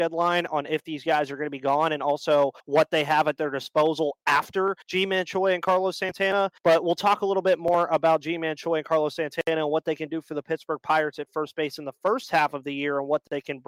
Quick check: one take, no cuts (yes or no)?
no